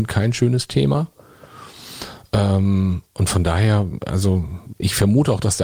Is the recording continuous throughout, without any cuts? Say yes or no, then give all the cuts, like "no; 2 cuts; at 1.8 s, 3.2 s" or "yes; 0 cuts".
yes; 0 cuts